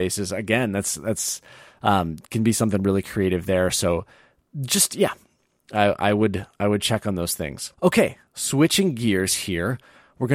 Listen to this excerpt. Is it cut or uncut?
uncut